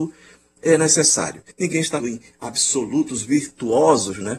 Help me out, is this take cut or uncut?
cut